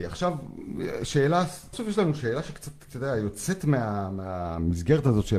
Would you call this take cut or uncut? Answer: cut